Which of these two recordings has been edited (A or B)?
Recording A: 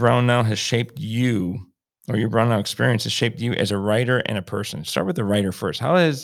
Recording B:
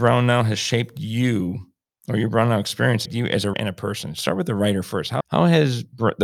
B